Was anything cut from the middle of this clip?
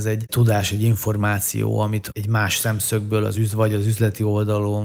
no; 0 cuts

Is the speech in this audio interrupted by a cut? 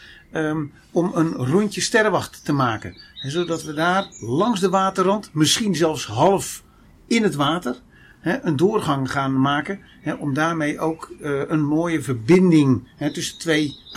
no; 0 cuts

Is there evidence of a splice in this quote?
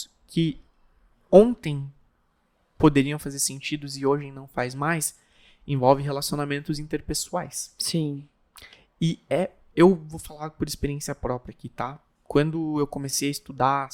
no; 0 cuts

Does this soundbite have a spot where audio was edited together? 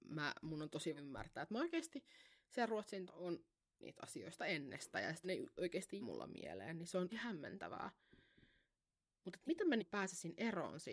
yes; 9 cuts; at 1.0 s, 3.1 s, 3.8 s, 5.2 s, 5.6 s, 6.0 s, 7.1 s, 9.5 s, 9.8 s

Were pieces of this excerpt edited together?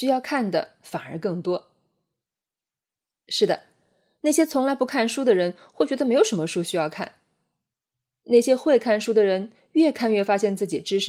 no; 0 cuts

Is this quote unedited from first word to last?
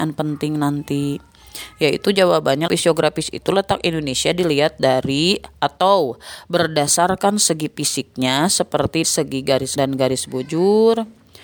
no; 3 cuts; at 2.7 s, 9.0 s, 9.8 s

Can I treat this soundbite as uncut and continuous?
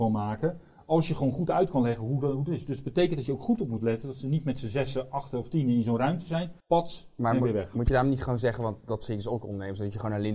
no; 1 cut; at 6.6 s

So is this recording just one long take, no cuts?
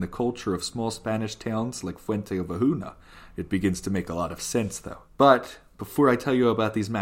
no; 1 cut; at 5.1 s

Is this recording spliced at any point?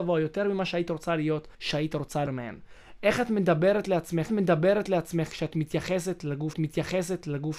yes; 4 cuts; at 1.5 s, 2.3 s, 4.3 s, 6.5 s

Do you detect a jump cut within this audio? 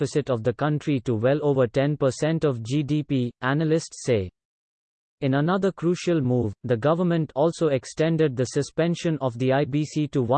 no; 0 cuts

